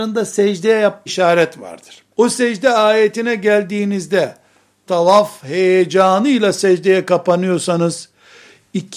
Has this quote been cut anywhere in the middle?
yes; 3 cuts; at 1.1 s, 2.1 s, 4.9 s

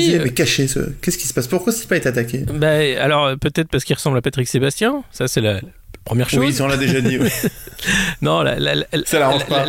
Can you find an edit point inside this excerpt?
no; 0 cuts

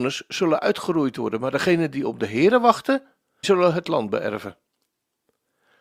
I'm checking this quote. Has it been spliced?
yes; 1 cut; at 3.4 s

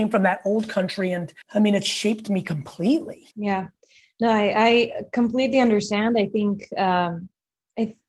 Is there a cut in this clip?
yes; 2 cuts; at 1.4 s, 3.3 s

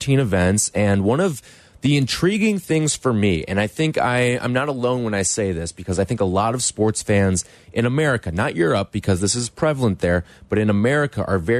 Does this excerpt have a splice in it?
no; 0 cuts

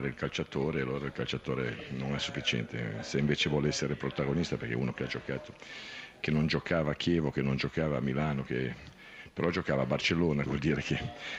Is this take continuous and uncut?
no; 1 cut; at 10.5 s

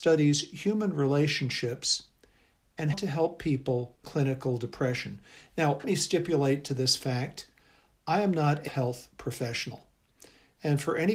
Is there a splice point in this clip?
yes; 4 cuts; at 2.9 s, 4.0 s, 5.8 s, 8.7 s

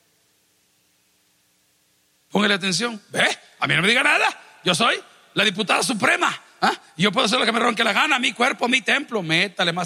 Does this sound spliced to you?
no; 0 cuts

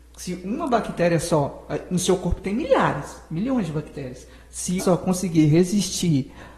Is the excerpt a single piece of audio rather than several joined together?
no; 1 cut; at 4.8 s

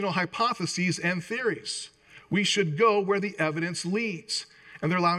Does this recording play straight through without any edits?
yes; 0 cuts

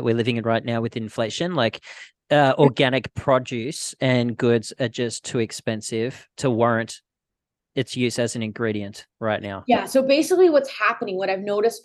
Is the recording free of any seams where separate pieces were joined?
yes; 0 cuts

